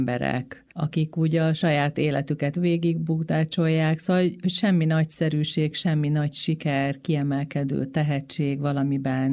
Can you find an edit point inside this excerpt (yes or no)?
no